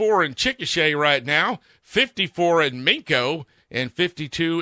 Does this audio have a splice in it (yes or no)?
no